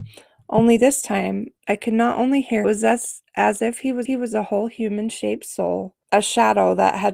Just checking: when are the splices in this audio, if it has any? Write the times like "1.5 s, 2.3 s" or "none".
1.6 s, 2.6 s, 4.1 s, 6.0 s